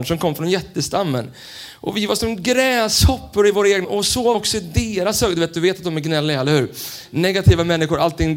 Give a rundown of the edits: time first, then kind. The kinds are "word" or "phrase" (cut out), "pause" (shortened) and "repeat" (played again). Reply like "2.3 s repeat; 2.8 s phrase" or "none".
3.8 s word; 4.3 s word